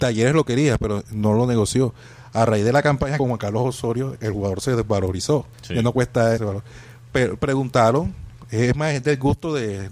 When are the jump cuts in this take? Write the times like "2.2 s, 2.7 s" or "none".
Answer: 3.2 s, 4.2 s, 5.5 s, 6.4 s

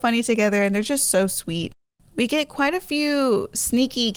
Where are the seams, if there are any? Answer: none

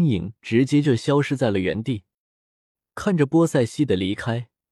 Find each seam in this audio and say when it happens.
none

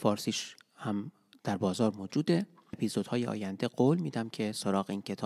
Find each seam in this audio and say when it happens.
2.7 s

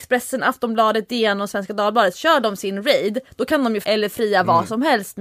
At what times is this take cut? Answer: 3.8 s

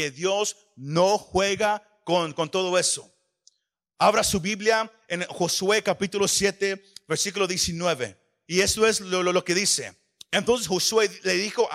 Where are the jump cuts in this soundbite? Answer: none

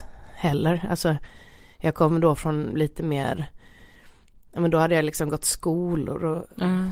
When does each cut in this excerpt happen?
none

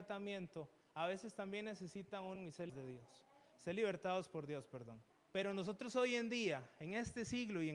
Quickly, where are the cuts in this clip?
2.4 s, 2.7 s, 5.1 s

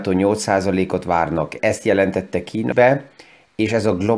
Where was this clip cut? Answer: 1.6 s, 2.7 s

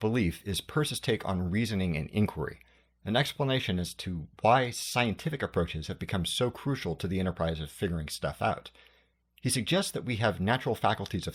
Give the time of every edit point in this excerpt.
none

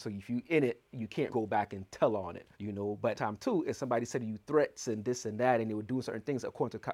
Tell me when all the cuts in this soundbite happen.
1.3 s, 2.5 s, 3.1 s

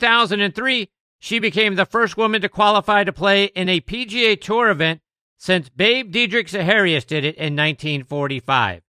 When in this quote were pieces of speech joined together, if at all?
none

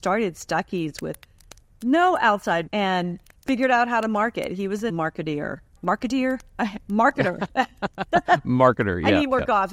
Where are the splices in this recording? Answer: 2.7 s, 3.3 s, 4.9 s, 5.8 s

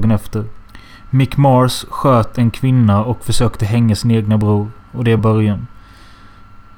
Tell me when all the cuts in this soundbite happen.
5.2 s

